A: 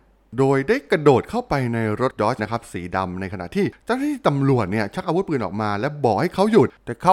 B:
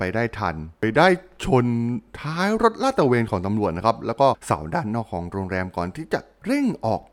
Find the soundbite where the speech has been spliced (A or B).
A